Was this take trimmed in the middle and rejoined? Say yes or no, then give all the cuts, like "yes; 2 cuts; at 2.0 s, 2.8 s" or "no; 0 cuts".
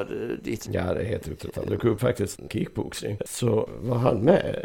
yes; 1 cut; at 2.5 s